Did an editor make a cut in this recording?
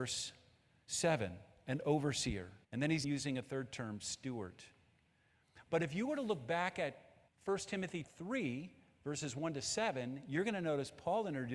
yes; 4 cuts; at 2.6 s, 3.0 s, 7.3 s, 8.0 s

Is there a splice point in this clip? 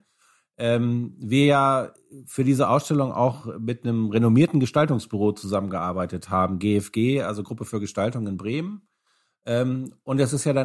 no; 0 cuts

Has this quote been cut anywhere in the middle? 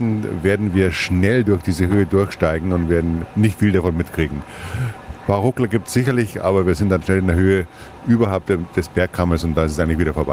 no; 0 cuts

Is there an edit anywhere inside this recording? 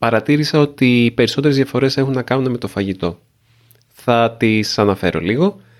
no; 0 cuts

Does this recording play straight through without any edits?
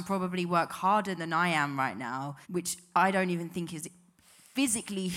no; 1 cut; at 2.4 s

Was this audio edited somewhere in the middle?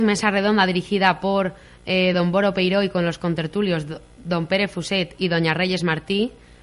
no; 0 cuts

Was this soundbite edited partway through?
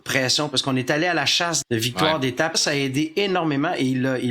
yes; 2 cuts; at 1.6 s, 2.5 s

